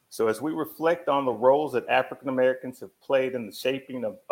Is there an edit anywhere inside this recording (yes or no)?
no